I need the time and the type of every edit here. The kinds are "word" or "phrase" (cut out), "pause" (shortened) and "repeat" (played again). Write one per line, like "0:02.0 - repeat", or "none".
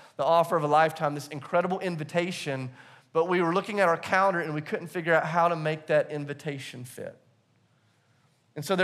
none

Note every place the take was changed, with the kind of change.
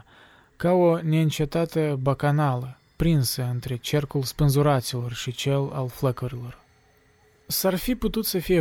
none

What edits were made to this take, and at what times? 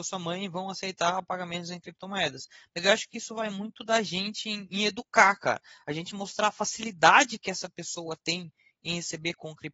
none

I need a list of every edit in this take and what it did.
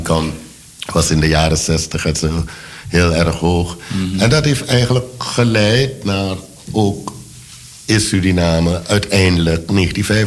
none

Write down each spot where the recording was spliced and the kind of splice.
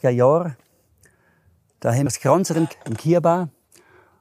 0:02.1 - word
0:02.7 - word

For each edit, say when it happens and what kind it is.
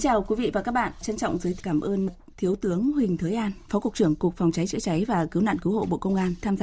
0:01.6 - word

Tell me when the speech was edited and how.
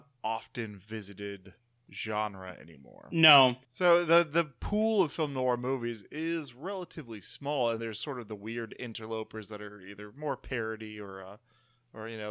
0:07.8 - word

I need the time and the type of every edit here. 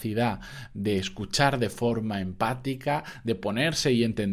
none

